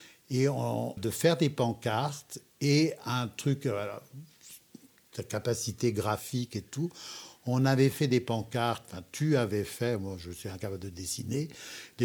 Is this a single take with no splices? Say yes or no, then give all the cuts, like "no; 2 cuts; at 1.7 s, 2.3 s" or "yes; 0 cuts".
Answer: no; 1 cut; at 1.0 s